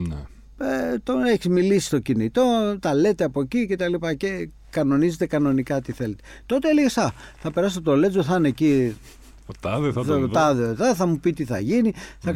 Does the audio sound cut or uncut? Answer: uncut